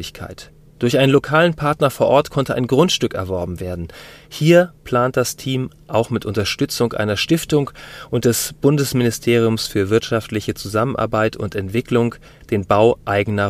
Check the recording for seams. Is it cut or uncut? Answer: uncut